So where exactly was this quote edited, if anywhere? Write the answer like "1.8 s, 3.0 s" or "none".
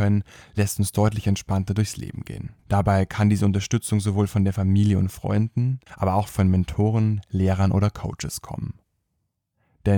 2.6 s, 5.9 s